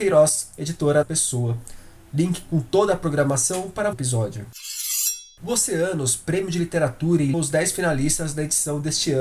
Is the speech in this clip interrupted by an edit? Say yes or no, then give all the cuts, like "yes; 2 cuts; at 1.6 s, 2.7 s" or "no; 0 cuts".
yes; 3 cuts; at 1.0 s, 3.9 s, 7.3 s